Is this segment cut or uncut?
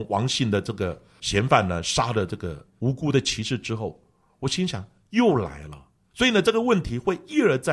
uncut